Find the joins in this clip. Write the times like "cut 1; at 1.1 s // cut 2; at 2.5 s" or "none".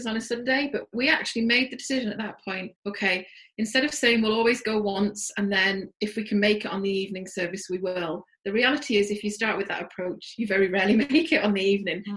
cut 1; at 2.8 s // cut 2; at 5.9 s